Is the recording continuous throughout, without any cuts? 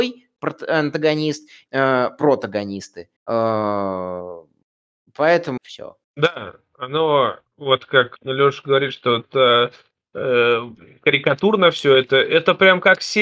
no; 6 cuts; at 1.7 s, 3.2 s, 5.6 s, 6.0 s, 7.5 s, 8.2 s

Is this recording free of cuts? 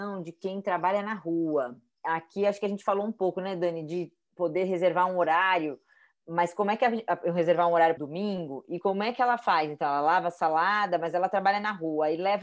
no; 1 cut; at 8.0 s

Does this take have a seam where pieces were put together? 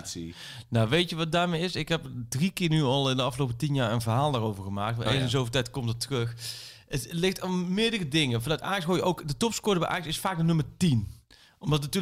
no; 0 cuts

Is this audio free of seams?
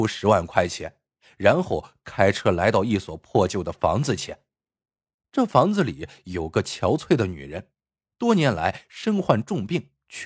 yes; 0 cuts

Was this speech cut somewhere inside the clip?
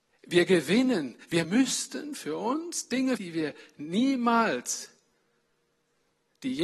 yes; 2 cuts; at 1.4 s, 3.2 s

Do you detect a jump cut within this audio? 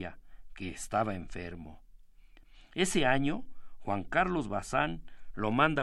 no; 0 cuts

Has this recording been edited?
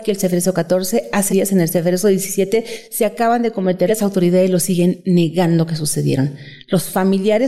yes; 2 cuts; at 1.3 s, 3.9 s

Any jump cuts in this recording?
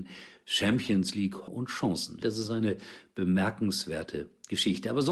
yes; 2 cuts; at 1.5 s, 2.2 s

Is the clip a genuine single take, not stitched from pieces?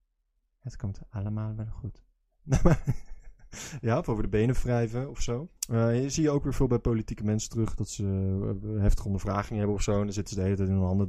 no; 1 cut; at 5.6 s

